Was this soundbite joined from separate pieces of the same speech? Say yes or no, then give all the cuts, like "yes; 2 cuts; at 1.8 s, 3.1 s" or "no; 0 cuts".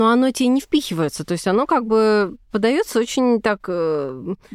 no; 0 cuts